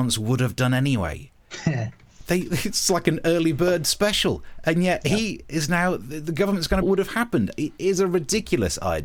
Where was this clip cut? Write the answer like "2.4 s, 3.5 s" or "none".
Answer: 6.8 s